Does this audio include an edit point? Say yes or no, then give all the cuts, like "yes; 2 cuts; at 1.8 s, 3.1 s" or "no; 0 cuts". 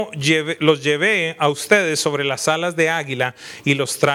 no; 0 cuts